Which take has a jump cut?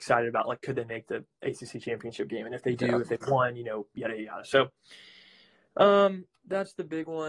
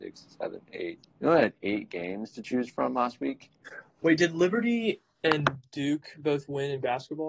second; 1 cut; at 1.1 s

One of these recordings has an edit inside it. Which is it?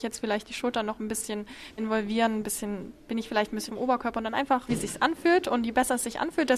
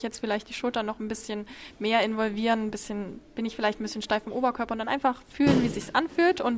first; 3 cuts; at 1.8 s, 3.7 s, 4.7 s

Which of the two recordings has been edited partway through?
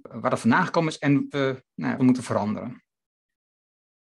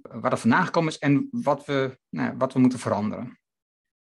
first; 2 cuts; at 1.3 s, 2.0 s

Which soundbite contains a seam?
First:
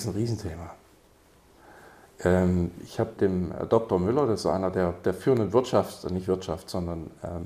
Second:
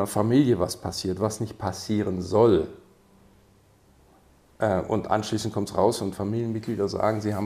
first; 1 cut; at 3.2 s

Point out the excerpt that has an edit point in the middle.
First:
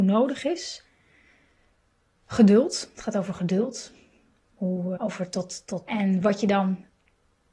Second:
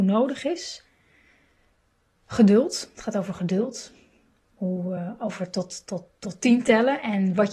first; 2 cuts; at 5.0 s, 5.9 s

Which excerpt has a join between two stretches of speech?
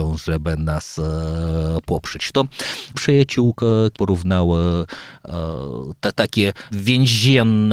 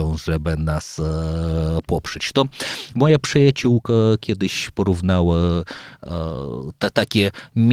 first; 3 cuts; at 2.9 s, 3.9 s, 6.7 s

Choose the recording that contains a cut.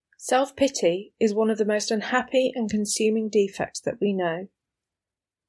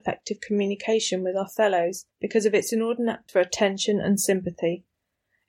second; 2 cuts; at 2.1 s, 3.3 s

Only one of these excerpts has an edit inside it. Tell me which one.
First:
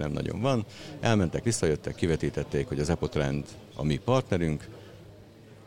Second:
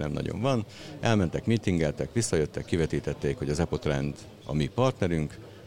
first; 1 cut; at 1.4 s

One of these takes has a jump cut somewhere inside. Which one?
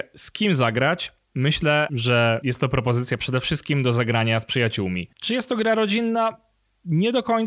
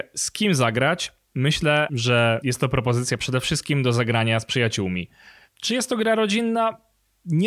first; 1 cut; at 5.1 s

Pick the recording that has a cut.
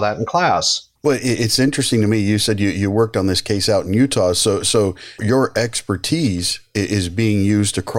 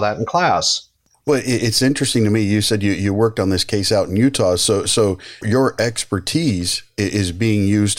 first; 1 cut; at 1.0 s

